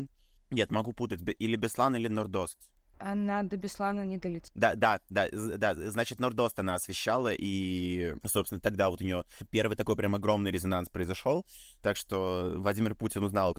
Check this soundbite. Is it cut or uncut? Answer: uncut